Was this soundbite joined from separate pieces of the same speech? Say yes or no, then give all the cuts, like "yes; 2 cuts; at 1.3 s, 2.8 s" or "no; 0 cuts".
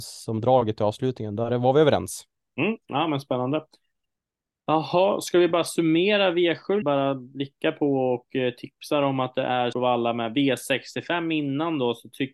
yes; 2 cuts; at 6.8 s, 9.7 s